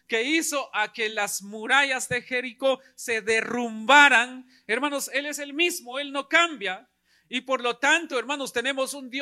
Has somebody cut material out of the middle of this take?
no; 0 cuts

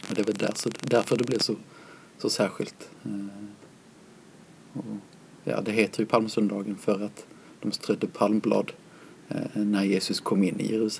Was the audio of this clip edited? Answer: no; 0 cuts

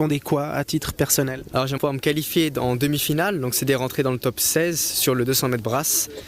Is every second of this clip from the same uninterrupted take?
no; 1 cut; at 1.8 s

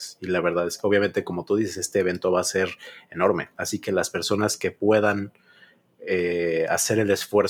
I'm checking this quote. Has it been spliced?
no; 0 cuts

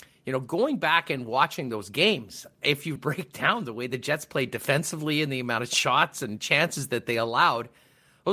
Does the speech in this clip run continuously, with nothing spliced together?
no; 1 cut; at 3.0 s

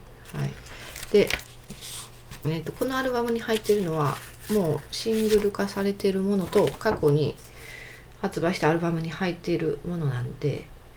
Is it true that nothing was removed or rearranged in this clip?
yes; 0 cuts

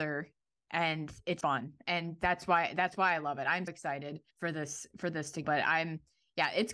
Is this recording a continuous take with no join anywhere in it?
no; 4 cuts; at 1.4 s, 3.7 s, 4.3 s, 5.4 s

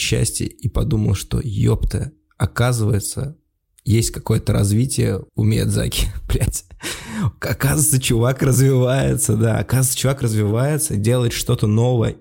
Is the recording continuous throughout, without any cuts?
no; 1 cut; at 5.3 s

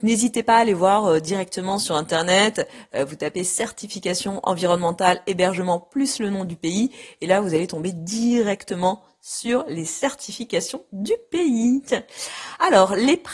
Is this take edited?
no; 0 cuts

